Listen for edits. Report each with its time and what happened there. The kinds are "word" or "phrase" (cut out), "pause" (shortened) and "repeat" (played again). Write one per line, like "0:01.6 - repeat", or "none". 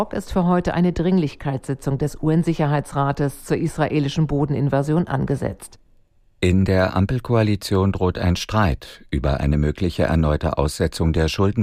none